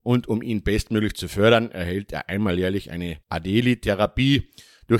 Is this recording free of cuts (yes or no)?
no